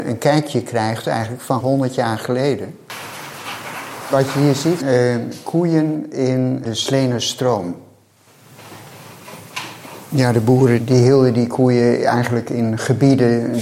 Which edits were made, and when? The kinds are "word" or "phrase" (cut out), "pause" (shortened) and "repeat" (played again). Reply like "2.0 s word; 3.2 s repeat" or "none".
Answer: 1.6 s word; 4.8 s word; 6.6 s word